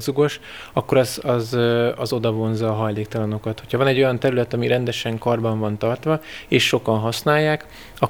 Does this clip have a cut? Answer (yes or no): no